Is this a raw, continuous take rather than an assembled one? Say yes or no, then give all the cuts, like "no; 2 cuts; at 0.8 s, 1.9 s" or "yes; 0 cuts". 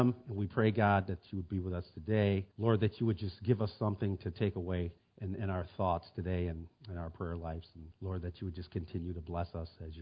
no; 3 cuts; at 2.5 s, 5.0 s, 7.9 s